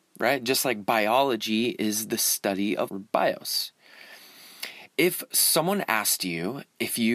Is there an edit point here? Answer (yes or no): yes